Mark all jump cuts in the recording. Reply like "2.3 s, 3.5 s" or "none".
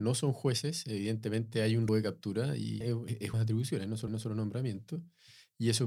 1.9 s, 2.8 s, 3.3 s, 4.1 s